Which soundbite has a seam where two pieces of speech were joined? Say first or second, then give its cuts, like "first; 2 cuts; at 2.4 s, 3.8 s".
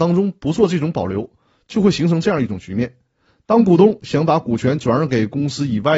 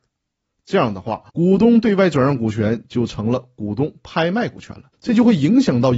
second; 2 cuts; at 1.3 s, 4.9 s